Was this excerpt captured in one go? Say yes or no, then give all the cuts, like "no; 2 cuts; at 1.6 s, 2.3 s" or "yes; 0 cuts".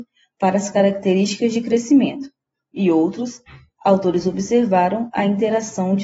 yes; 0 cuts